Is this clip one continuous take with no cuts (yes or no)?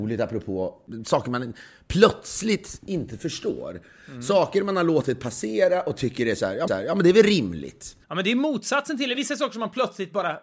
no